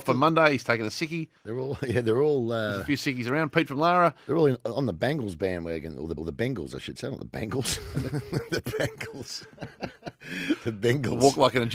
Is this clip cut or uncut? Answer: cut